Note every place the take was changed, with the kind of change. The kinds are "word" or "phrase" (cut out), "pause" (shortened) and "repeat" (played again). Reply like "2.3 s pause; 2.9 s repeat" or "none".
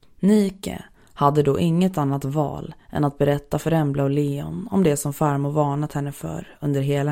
none